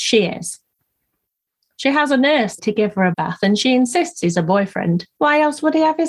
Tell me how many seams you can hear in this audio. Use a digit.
3